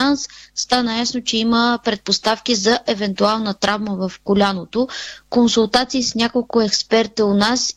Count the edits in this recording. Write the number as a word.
zero